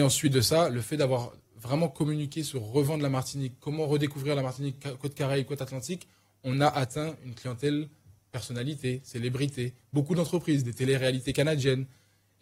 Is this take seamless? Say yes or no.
yes